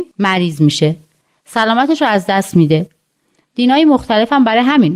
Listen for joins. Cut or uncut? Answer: uncut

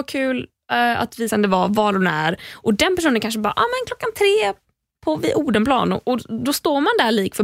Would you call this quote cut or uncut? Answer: cut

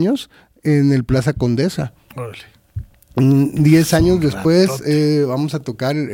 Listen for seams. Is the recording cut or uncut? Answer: uncut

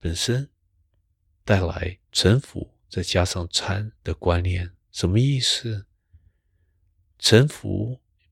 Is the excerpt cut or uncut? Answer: cut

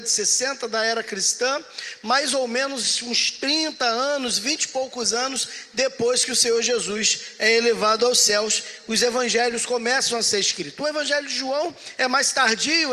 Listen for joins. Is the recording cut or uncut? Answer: uncut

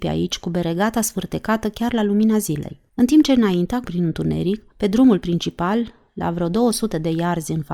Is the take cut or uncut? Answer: cut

